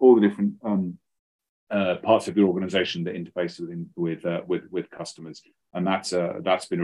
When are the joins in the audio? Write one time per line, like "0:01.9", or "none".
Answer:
none